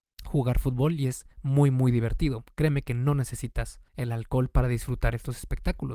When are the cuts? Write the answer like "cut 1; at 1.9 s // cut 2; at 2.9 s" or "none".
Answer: cut 1; at 1.3 s // cut 2; at 3.9 s